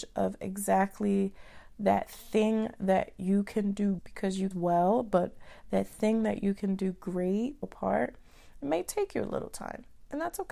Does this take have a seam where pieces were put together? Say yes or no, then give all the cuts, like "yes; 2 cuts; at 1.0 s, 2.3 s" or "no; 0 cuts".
yes; 3 cuts; at 4.0 s, 4.5 s, 7.6 s